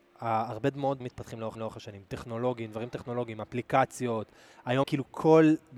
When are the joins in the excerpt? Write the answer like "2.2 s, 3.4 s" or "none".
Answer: 1.0 s, 1.6 s, 4.8 s